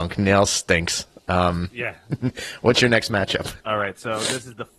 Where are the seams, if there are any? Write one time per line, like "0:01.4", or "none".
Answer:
0:03.6